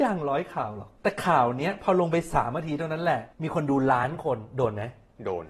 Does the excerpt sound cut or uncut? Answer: cut